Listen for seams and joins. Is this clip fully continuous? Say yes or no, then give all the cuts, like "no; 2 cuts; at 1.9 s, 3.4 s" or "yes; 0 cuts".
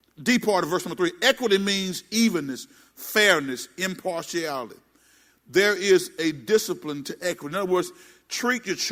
yes; 0 cuts